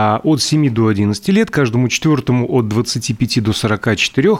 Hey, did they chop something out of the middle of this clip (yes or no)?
no